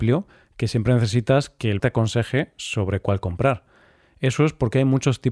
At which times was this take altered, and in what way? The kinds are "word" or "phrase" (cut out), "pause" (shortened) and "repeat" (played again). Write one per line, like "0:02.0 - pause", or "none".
0:01.8 - word